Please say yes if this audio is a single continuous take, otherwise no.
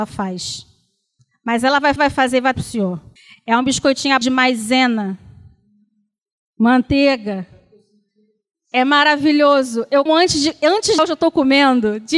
no